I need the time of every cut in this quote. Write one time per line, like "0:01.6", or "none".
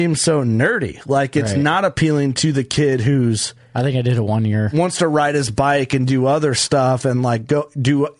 none